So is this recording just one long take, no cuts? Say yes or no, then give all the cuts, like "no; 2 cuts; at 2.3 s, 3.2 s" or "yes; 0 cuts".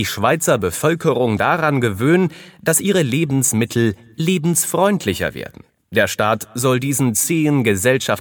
yes; 0 cuts